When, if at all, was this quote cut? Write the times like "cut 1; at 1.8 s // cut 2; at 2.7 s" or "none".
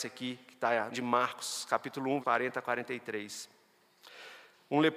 cut 1; at 0.9 s // cut 2; at 2.2 s